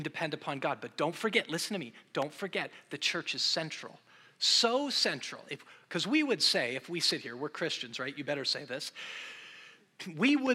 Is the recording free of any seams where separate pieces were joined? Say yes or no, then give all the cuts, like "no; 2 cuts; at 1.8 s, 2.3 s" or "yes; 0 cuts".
yes; 0 cuts